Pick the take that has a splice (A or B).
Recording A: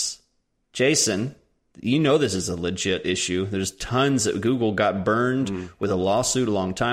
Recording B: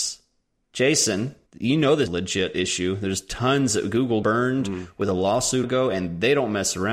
B